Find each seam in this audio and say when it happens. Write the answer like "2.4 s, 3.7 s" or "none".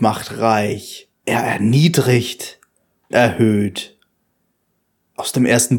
1.2 s, 3.1 s